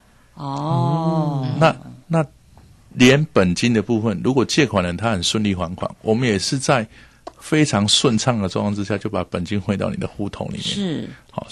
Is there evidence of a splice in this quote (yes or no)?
no